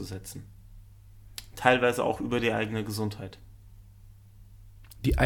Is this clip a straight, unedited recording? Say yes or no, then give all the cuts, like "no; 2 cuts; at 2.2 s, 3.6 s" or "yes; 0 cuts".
yes; 0 cuts